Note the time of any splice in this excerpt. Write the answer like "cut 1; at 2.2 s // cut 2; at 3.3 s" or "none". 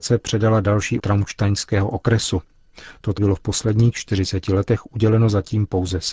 cut 1; at 1.0 s // cut 2; at 3.2 s